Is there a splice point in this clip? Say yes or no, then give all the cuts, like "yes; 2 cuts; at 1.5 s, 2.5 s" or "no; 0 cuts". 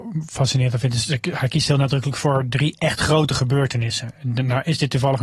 no; 0 cuts